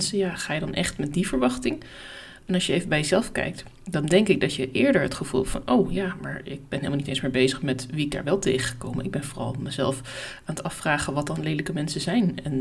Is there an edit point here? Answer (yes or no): no